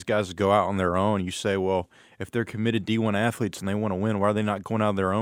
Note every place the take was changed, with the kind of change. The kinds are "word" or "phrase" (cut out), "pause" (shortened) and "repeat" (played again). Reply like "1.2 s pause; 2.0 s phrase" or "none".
none